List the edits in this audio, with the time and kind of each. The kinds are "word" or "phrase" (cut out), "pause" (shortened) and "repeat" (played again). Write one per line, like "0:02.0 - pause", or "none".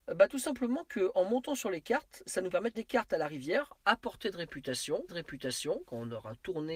0:02.7 - word
0:05.1 - repeat